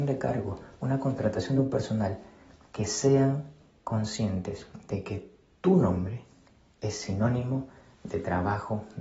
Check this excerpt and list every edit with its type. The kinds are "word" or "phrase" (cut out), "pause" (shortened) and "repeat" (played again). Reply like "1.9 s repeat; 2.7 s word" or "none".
none